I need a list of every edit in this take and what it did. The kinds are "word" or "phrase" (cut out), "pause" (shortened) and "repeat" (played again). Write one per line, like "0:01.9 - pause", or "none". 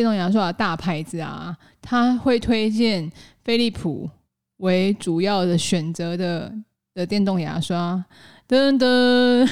none